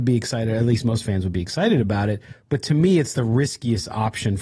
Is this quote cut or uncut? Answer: uncut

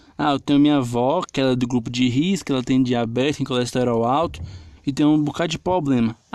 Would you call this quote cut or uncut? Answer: cut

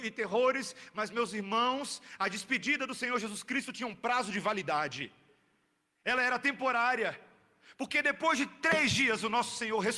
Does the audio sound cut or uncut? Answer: uncut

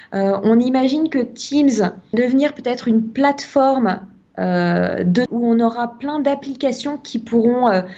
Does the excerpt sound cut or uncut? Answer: cut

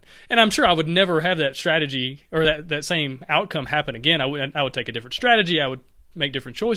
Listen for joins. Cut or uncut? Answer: uncut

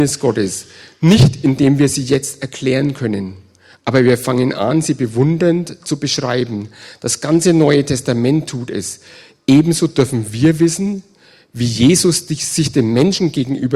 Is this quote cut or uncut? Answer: uncut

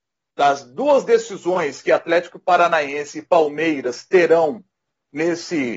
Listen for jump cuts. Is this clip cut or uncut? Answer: uncut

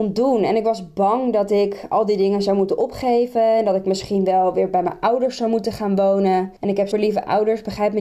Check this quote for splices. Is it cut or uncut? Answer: cut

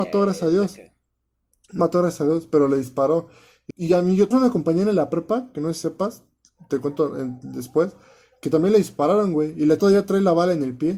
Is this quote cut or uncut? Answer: cut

